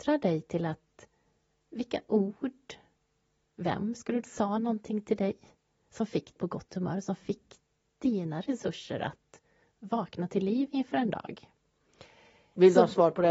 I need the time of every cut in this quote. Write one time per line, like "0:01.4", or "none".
0:04.2
0:06.4